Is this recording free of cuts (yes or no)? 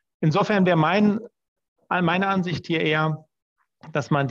yes